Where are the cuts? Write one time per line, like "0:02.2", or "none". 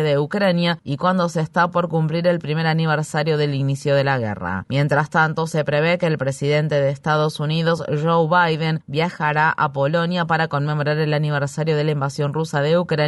none